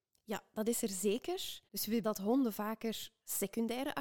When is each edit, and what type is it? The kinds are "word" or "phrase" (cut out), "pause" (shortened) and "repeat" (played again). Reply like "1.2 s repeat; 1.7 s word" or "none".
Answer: 1.7 s pause; 2.0 s word